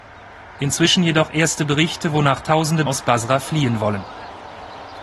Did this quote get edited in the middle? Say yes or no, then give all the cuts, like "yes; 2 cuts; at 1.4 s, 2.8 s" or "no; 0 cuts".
yes; 1 cut; at 2.9 s